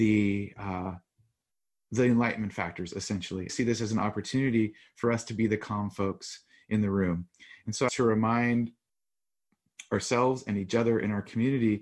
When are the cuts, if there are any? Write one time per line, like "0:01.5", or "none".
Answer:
0:03.5
0:07.9